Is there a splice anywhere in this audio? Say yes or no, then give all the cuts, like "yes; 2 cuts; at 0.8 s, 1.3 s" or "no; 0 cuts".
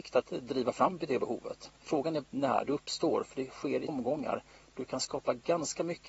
yes; 3 cuts; at 1.8 s, 2.2 s, 3.9 s